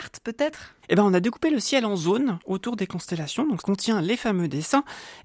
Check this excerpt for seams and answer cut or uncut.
cut